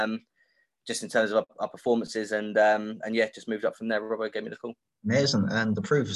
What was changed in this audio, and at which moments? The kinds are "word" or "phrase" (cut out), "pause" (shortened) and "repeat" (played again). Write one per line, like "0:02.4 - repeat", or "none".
0:04.8 - pause